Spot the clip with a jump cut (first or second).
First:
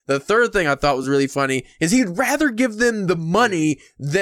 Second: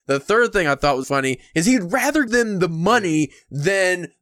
second